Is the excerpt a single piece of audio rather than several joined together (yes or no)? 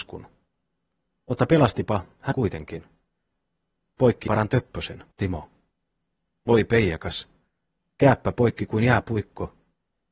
no